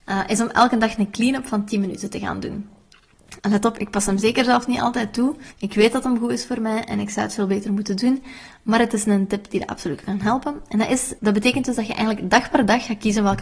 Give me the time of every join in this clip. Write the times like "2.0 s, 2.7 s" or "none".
3.4 s, 5.5 s, 11.2 s